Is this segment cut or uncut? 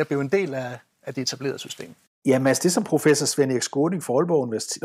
uncut